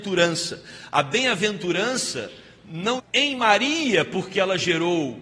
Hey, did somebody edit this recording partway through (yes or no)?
yes